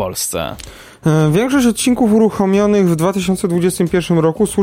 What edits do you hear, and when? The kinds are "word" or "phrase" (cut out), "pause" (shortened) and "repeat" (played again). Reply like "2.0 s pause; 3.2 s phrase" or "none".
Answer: none